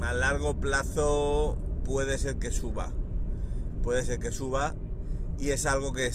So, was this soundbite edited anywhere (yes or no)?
no